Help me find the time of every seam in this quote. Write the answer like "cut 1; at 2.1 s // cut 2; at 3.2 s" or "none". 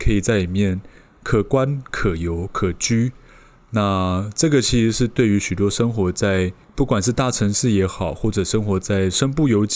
cut 1; at 6.6 s

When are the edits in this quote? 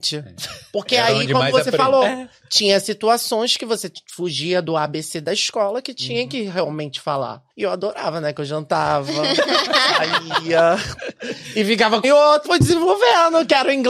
cut 1; at 7.5 s // cut 2; at 12.0 s // cut 3; at 12.4 s

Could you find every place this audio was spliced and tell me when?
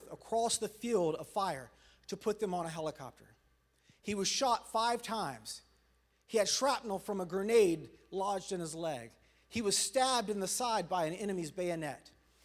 none

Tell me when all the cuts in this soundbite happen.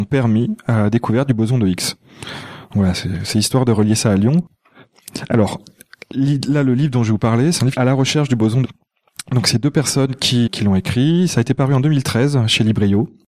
cut 1; at 7.7 s // cut 2; at 8.6 s // cut 3; at 10.5 s

